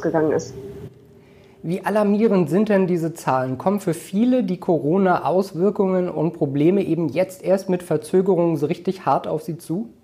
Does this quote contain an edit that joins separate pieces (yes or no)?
no